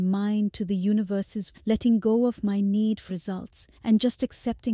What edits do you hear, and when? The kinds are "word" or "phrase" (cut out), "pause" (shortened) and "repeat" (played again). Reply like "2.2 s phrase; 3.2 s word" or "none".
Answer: 1.5 s word; 3.1 s word; 3.7 s pause